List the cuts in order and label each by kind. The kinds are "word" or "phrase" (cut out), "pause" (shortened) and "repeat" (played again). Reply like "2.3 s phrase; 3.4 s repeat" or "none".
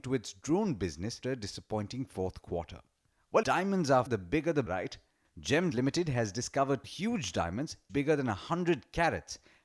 1.2 s word; 3.4 s word; 4.1 s word; 4.7 s word; 5.7 s word; 6.8 s word; 7.9 s word